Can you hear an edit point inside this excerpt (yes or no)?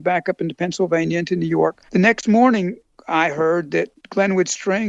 yes